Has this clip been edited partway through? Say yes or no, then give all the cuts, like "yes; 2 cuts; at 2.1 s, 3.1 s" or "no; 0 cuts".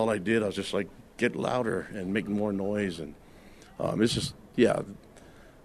no; 0 cuts